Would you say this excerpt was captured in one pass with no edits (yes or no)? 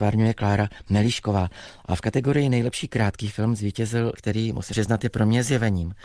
no